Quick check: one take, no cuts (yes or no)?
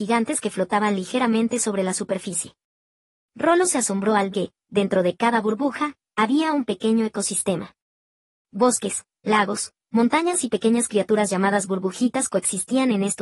no